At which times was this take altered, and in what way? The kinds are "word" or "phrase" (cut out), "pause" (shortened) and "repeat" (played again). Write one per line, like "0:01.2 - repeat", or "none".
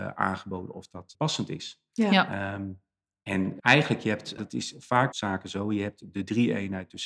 0:01.1 - word
0:03.6 - word
0:04.4 - word
0:05.1 - phrase